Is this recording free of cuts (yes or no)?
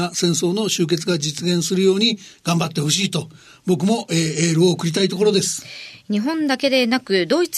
yes